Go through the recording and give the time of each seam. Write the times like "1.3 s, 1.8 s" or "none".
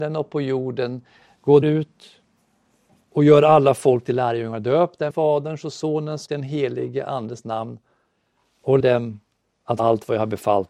1.6 s, 5.1 s, 6.3 s, 8.8 s, 9.8 s

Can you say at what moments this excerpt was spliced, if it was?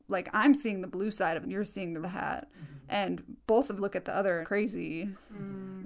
1.4 s, 2.0 s, 3.4 s, 3.8 s, 4.4 s

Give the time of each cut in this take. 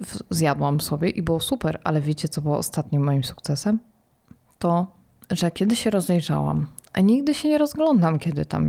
none

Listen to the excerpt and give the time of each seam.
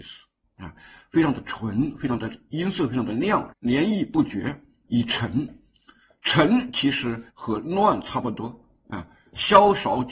3.5 s, 4.8 s, 7.3 s

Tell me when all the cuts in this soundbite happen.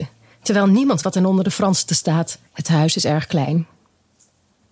1.0 s, 1.9 s, 2.5 s

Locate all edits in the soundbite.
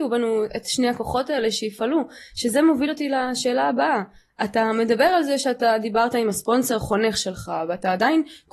none

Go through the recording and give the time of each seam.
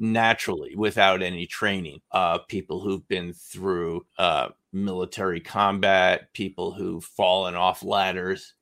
2.0 s, 4.1 s

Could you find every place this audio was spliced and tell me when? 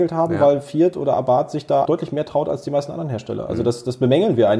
1.9 s

